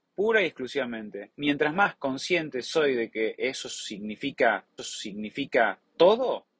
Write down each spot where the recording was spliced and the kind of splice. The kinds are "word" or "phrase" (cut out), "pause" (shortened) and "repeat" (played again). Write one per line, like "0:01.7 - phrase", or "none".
0:01.3 - pause
0:04.8 - repeat

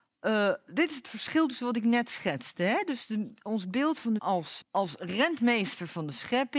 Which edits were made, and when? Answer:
0:04.2 - word
0:04.6 - word

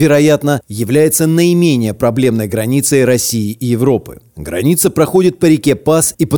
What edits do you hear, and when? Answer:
none

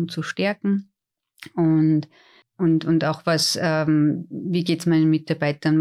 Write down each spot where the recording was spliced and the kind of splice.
none

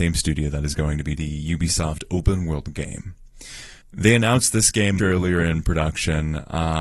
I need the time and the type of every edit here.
0:01.2 - word
0:03.8 - pause
0:05.0 - word

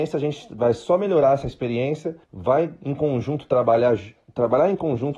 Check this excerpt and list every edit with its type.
0:02.2 - pause

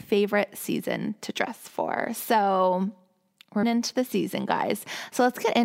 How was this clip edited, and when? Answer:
0:03.6 - word

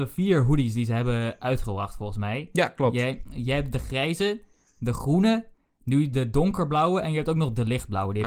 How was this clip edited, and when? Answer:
none

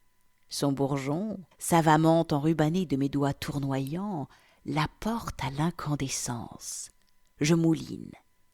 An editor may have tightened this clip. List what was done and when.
0:01.5 - pause

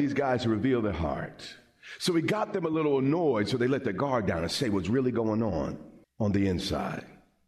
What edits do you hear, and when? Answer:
0:06.0 - pause

